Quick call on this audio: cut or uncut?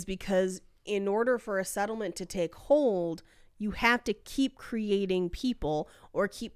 uncut